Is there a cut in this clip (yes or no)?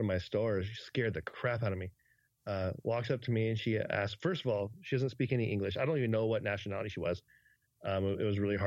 no